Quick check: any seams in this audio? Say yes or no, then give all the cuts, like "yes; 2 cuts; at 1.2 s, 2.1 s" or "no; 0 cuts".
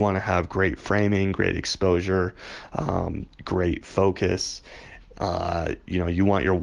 no; 0 cuts